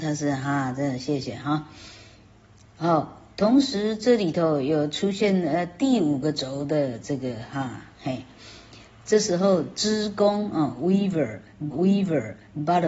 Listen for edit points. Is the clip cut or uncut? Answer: cut